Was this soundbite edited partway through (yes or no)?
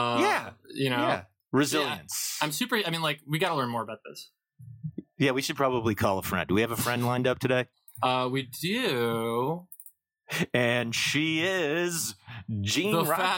no